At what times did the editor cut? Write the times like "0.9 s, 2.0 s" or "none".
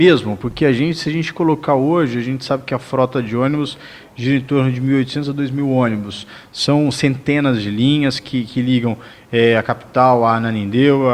none